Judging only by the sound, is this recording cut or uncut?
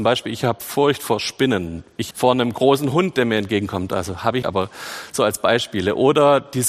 cut